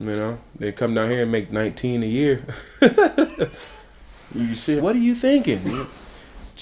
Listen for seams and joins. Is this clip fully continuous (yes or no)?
no